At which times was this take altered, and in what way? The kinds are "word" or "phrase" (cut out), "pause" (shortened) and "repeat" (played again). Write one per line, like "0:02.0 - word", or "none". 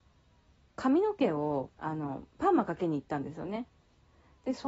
0:01.7 - pause
0:02.3 - pause

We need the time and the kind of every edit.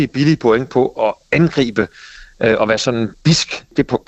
none

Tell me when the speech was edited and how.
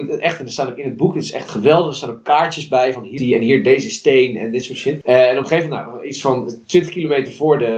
0:03.2 - word

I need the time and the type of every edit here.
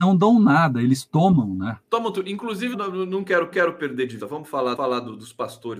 0:01.8 - pause
0:02.7 - word
0:03.5 - repeat
0:04.2 - word
0:04.8 - repeat

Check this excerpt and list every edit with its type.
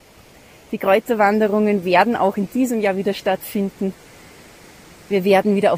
none

